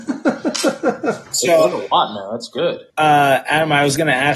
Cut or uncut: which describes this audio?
cut